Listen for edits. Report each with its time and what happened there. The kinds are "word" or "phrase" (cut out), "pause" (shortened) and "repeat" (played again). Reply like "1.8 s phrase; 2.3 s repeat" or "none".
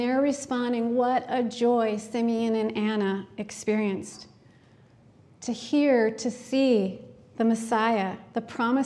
none